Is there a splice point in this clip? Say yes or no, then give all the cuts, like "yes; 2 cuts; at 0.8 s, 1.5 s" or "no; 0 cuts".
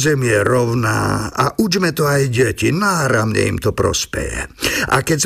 no; 0 cuts